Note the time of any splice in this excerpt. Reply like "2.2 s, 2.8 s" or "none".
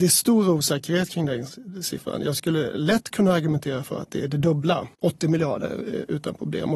4.9 s